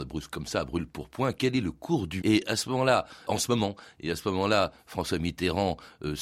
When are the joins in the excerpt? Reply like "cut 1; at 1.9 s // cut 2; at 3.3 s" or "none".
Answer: cut 1; at 2.2 s // cut 2; at 3.2 s